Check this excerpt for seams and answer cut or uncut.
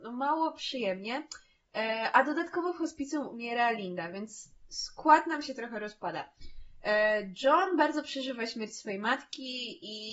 uncut